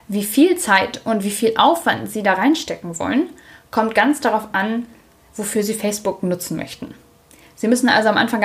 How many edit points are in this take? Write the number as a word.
zero